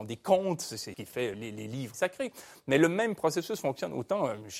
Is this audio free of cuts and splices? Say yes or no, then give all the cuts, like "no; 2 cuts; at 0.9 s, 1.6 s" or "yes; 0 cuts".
no; 3 cuts; at 0.9 s, 1.3 s, 1.9 s